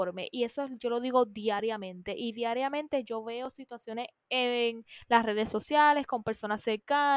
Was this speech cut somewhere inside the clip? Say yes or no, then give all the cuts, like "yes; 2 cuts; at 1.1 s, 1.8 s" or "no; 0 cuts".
no; 0 cuts